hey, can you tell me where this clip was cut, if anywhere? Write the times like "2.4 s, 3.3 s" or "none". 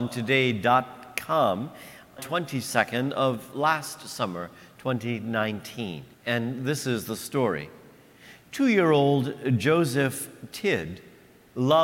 2.2 s, 6.1 s